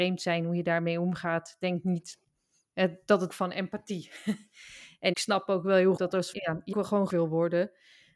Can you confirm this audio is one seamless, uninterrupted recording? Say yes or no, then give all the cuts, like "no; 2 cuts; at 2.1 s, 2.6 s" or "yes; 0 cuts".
no; 6 cuts; at 3.3 s, 5.1 s, 6.0 s, 6.3 s, 6.7 s, 7.1 s